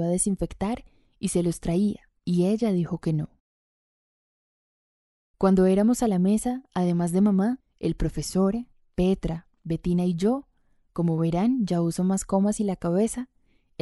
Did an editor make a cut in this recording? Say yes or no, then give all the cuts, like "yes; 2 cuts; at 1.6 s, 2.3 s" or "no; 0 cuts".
no; 0 cuts